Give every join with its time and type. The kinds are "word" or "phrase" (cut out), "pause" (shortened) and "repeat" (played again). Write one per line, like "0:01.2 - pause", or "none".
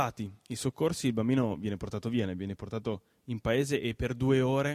none